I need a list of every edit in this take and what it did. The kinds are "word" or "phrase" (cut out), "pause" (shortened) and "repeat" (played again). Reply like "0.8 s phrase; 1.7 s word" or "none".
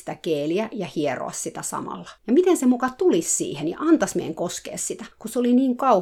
2.2 s pause; 5.1 s pause